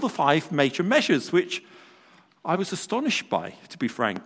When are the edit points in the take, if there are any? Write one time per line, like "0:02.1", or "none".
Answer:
none